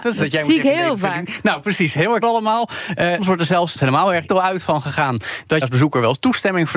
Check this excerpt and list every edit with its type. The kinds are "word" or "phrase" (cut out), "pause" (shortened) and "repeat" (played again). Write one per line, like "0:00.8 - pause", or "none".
0:02.2 - word
0:03.2 - word
0:03.8 - word
0:04.3 - word
0:05.6 - word

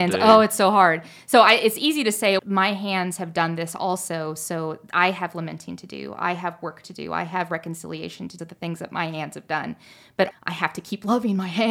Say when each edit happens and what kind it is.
0:02.4 - word
0:08.4 - phrase
0:10.3 - word

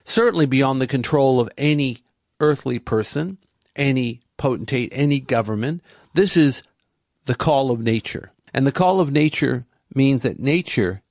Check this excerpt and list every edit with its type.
none

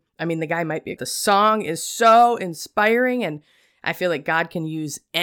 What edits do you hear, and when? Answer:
0:01.0 - phrase

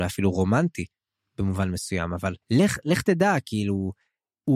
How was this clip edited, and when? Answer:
0:02.4 - pause

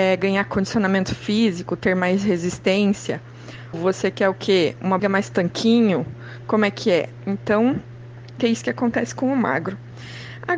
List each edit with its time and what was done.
0:03.7 - word
0:05.0 - word
0:08.4 - word

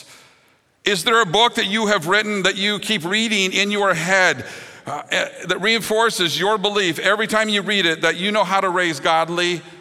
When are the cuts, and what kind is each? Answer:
none

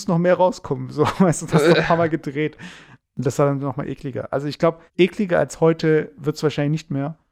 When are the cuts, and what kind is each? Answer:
0:04.9 - pause

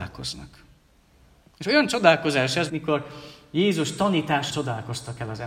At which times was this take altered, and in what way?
0:02.7 - word
0:04.5 - word

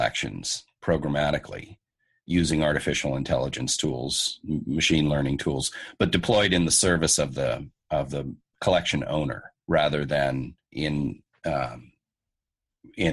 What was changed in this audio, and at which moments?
0:02.3 - word
0:07.8 - pause
0:09.6 - pause
0:10.6 - pause

